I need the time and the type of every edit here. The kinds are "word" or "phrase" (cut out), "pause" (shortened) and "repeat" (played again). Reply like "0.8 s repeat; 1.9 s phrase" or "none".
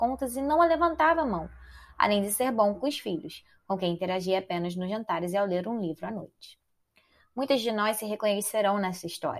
none